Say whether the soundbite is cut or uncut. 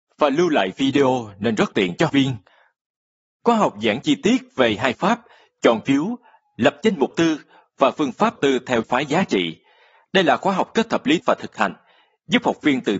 cut